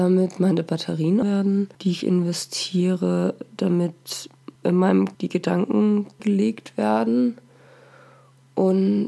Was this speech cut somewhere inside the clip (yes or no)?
yes